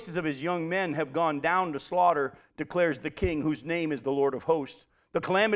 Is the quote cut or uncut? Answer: uncut